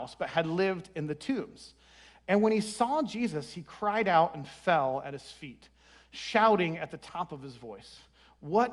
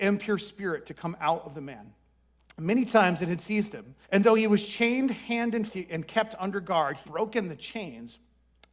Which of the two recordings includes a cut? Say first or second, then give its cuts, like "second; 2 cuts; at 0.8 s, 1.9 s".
second; 3 cuts; at 4.0 s, 5.7 s, 7.0 s